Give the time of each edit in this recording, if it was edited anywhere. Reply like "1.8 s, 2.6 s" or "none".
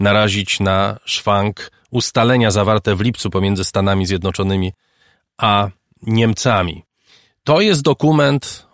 none